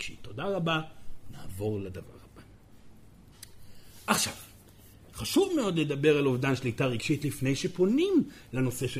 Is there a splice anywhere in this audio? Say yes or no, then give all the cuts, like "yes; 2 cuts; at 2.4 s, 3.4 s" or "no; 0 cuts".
no; 0 cuts